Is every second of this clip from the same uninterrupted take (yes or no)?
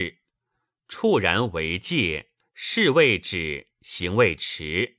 no